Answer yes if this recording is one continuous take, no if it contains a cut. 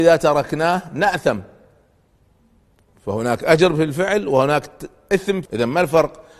no